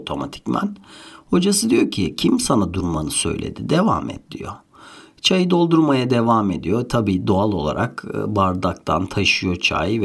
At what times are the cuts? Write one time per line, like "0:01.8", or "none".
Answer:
none